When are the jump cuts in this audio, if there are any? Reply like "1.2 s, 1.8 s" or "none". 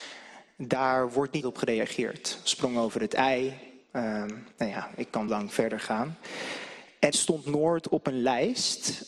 1.4 s, 4.5 s, 5.3 s, 7.1 s